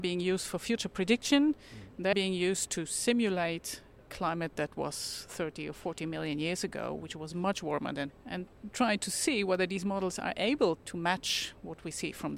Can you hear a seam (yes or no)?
yes